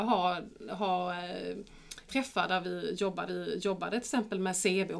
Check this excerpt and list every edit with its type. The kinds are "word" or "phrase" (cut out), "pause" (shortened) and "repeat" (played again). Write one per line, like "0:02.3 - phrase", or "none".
0:02.1 - word
0:03.3 - repeat